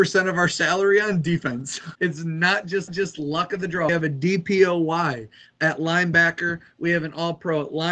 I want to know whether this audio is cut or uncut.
cut